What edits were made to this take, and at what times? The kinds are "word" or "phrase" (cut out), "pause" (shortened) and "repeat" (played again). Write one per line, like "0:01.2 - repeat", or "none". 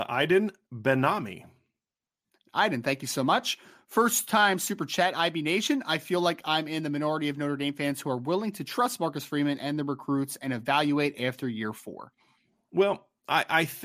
none